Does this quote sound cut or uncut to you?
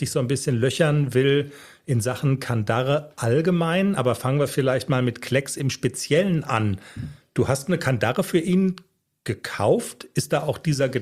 uncut